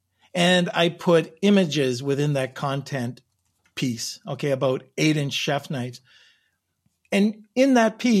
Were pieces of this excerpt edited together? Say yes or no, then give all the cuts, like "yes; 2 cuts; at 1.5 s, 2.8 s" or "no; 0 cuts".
no; 0 cuts